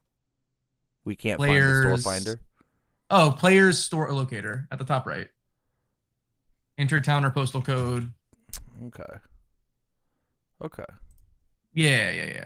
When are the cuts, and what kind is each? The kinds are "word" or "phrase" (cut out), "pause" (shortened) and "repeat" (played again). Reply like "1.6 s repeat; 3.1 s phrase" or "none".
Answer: none